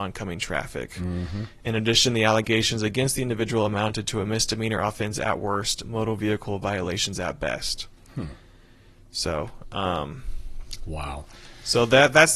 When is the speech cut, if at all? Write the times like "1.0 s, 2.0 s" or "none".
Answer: none